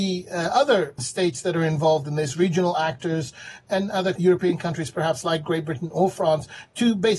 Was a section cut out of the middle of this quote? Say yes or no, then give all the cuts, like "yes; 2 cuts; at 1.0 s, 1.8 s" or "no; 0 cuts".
no; 0 cuts